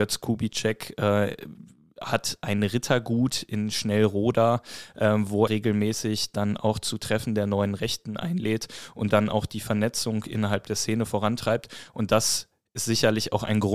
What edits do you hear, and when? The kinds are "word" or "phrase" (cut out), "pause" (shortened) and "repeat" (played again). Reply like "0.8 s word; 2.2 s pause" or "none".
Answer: 5.5 s word; 9.1 s word